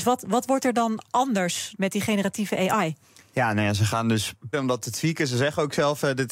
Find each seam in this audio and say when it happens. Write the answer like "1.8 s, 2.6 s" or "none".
1.8 s, 4.5 s